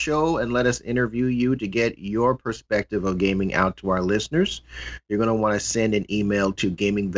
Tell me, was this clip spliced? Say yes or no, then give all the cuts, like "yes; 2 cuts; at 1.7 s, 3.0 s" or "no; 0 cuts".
no; 0 cuts